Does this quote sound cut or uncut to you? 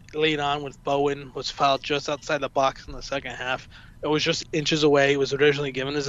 uncut